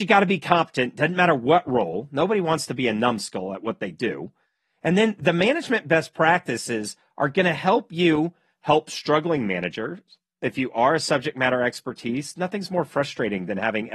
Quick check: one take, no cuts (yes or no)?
yes